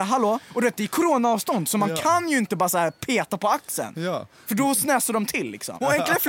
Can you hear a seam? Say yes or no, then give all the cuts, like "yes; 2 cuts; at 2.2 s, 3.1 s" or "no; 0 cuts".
no; 0 cuts